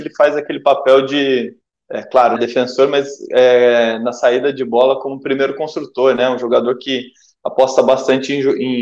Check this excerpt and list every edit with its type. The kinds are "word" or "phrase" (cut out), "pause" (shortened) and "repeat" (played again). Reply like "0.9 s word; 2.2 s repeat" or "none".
2.4 s word